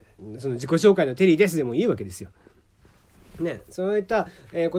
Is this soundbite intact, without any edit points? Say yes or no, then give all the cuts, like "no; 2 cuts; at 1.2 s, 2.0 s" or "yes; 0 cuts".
yes; 0 cuts